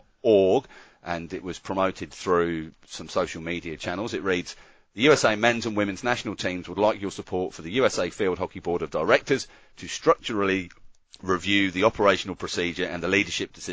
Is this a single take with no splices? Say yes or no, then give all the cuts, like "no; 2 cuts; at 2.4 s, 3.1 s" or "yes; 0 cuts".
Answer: yes; 0 cuts